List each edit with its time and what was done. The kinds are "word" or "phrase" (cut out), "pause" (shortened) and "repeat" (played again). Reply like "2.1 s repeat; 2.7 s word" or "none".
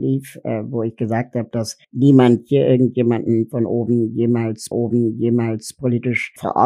1.8 s pause; 4.7 s repeat